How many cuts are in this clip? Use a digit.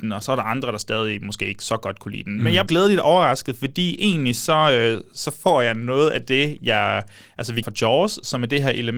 2